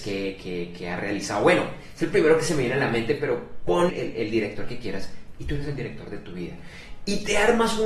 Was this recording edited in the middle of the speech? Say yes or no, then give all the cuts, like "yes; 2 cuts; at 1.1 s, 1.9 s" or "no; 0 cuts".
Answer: yes; 1 cut; at 3.9 s